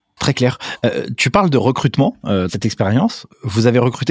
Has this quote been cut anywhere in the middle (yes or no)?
yes